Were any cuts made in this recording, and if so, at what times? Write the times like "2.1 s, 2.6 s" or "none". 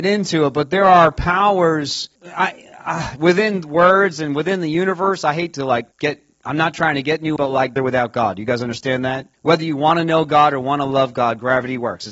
2.2 s, 5.9 s, 7.4 s, 7.8 s, 9.3 s

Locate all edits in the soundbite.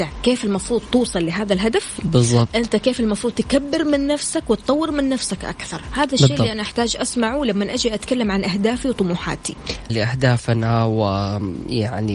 9.9 s

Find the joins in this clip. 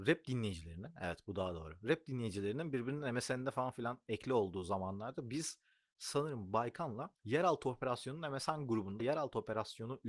9.0 s

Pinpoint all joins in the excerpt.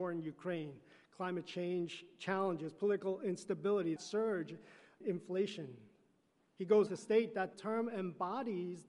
4.0 s, 5.0 s, 6.9 s, 7.5 s

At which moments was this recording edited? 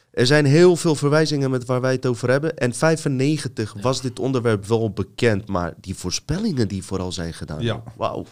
none

